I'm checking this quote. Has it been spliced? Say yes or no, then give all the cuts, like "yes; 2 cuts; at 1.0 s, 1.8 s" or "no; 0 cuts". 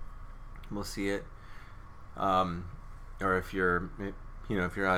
no; 0 cuts